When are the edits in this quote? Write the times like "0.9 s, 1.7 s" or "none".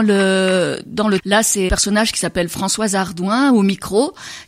1.2 s, 1.7 s